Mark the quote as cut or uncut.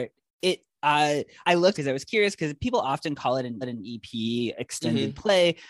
cut